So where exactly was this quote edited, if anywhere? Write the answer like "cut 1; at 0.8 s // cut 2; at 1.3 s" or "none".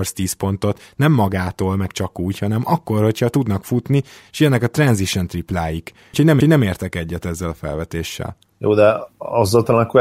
cut 1; at 6.4 s